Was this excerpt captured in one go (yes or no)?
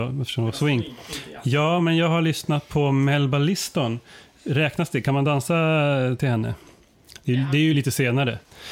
yes